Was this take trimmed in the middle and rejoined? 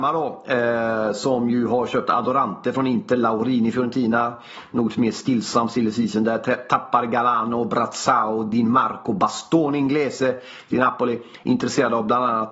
no; 0 cuts

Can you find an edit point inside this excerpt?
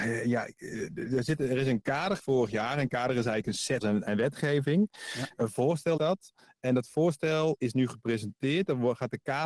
yes; 4 cuts; at 2.2 s, 3.8 s, 6.0 s, 7.6 s

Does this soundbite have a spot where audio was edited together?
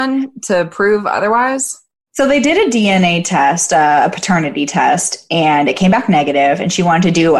no; 0 cuts

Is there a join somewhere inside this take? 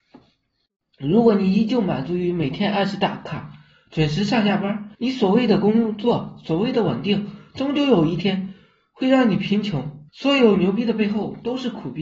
yes; 2 cuts; at 4.9 s, 10.1 s

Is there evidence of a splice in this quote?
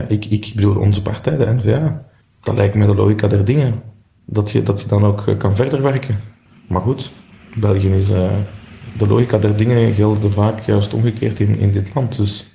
no; 0 cuts

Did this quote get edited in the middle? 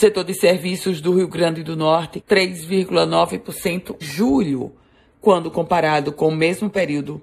yes; 2 cuts; at 2.2 s, 4.0 s

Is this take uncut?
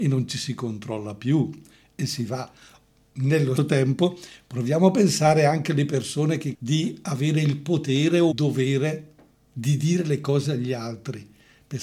no; 3 cuts; at 3.6 s, 6.5 s, 8.3 s

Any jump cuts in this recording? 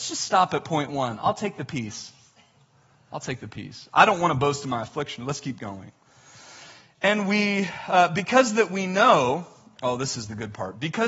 no; 0 cuts

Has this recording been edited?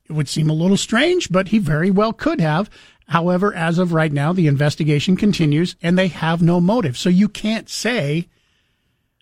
no; 0 cuts

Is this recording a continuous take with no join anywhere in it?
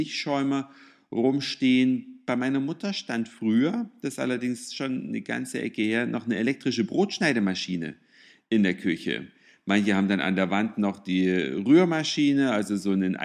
yes; 0 cuts

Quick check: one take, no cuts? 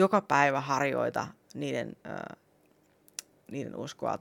no; 1 cut; at 2.0 s

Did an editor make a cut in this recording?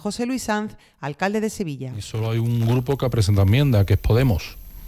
no; 0 cuts

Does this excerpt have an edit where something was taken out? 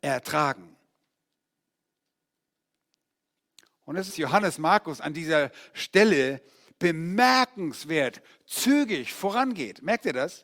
yes; 1 cut; at 4.1 s

